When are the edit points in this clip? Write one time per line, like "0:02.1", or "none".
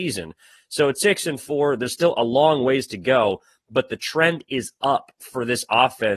none